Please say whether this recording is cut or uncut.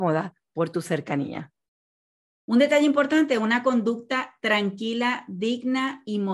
uncut